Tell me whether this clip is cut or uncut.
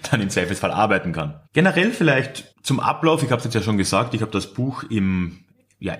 cut